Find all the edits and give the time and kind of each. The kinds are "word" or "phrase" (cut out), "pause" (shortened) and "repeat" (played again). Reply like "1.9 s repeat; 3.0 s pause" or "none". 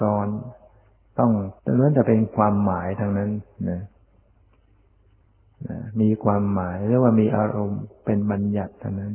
1.6 s pause